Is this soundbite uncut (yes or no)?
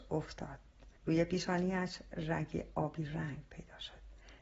no